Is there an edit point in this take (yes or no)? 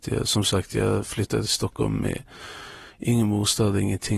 no